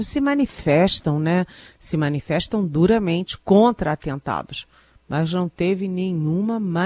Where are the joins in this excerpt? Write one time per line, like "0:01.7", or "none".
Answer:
none